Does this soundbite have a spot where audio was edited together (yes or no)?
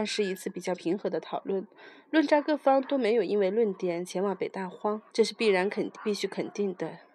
yes